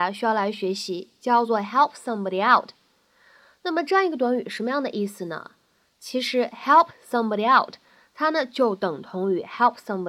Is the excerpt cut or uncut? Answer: uncut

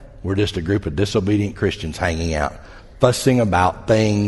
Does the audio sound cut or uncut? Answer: uncut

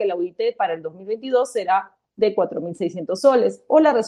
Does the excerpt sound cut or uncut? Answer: uncut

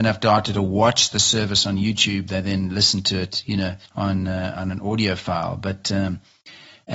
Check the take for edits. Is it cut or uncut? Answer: cut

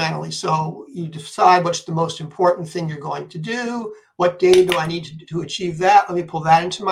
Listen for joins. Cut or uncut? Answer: uncut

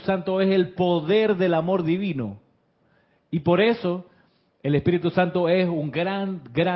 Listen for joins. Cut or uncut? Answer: uncut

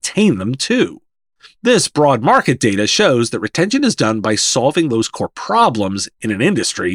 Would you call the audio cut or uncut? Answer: uncut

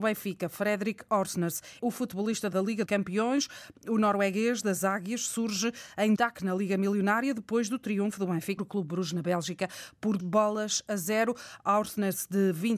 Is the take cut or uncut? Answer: cut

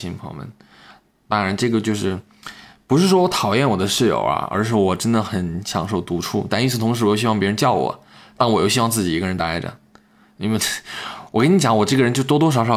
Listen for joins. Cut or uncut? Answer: uncut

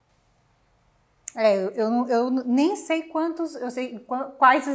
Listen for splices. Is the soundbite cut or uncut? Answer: uncut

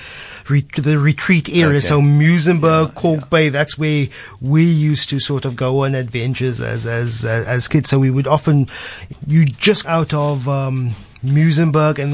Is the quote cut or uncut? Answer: cut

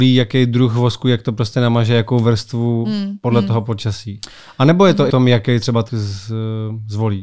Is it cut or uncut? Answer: cut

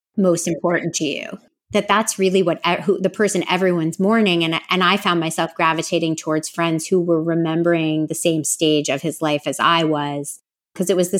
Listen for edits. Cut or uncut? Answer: uncut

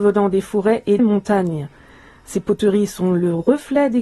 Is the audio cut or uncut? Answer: cut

